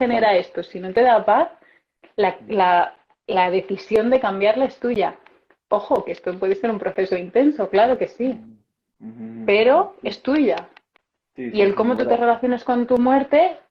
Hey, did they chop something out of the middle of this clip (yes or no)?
no